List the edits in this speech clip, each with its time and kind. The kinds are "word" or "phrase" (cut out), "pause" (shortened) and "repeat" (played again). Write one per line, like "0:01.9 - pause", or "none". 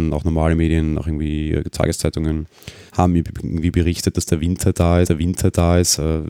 0:02.9 - pause
0:05.0 - repeat